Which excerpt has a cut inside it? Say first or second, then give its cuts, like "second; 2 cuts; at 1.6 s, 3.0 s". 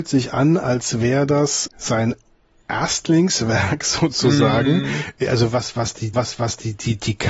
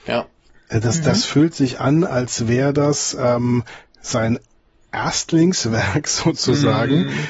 first; 2 cuts; at 1.7 s, 6.1 s